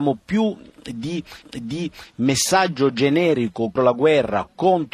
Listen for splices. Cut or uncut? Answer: cut